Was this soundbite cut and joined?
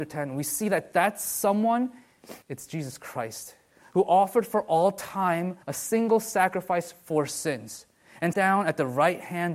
yes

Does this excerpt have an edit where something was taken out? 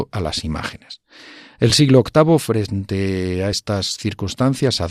no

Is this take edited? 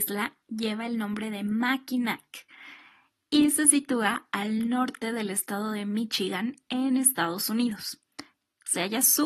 no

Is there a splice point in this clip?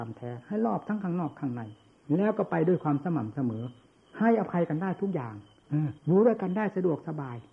yes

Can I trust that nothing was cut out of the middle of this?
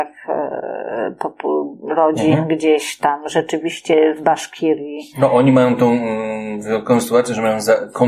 no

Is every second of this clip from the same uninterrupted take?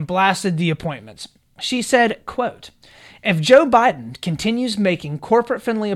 yes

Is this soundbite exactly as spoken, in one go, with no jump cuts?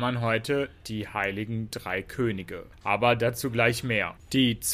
yes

